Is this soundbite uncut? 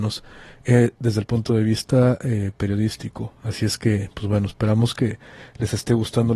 yes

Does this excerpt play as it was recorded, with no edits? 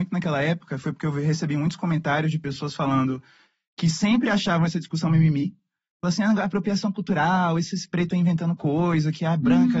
yes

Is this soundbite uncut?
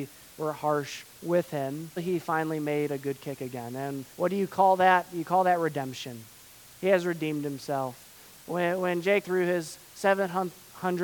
no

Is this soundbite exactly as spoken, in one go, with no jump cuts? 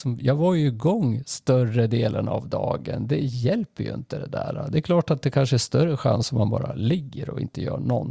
yes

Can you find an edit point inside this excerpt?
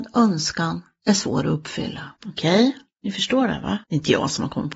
yes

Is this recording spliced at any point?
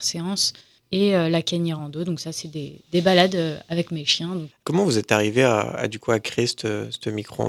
no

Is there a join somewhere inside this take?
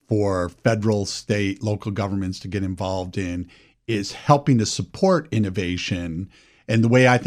no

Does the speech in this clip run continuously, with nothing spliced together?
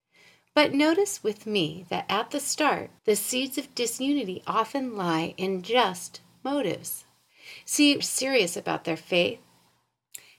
no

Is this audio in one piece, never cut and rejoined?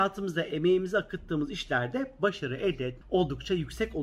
no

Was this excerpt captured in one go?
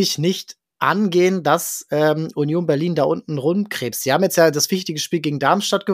yes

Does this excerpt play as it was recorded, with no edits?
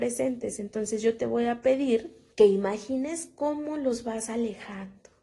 no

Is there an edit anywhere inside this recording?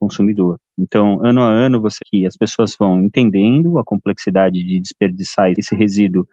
yes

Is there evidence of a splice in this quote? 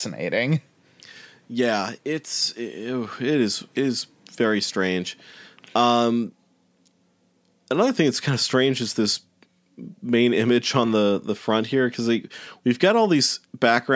no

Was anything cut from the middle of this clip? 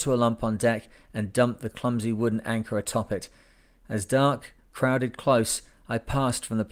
no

